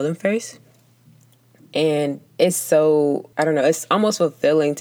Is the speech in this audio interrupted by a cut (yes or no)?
yes